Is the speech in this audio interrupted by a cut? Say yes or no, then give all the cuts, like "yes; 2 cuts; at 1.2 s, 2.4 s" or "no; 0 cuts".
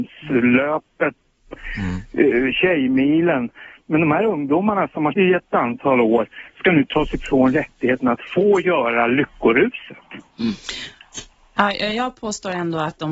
yes; 1 cut; at 5.1 s